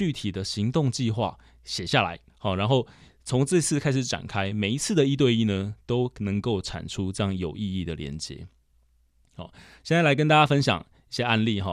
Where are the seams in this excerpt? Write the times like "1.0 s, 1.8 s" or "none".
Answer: 2.3 s